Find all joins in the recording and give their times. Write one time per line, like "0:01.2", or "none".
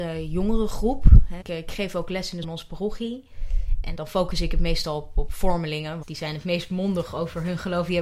0:01.4
0:02.4
0:03.9
0:06.0